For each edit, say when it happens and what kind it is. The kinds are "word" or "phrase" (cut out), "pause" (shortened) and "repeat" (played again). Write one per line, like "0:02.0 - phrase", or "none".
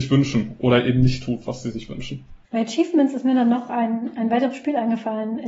0:02.4 - pause